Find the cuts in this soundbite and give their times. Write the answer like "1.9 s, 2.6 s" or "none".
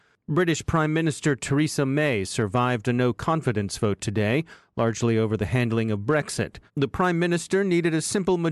6.7 s